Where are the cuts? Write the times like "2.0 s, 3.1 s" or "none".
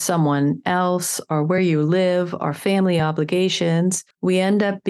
none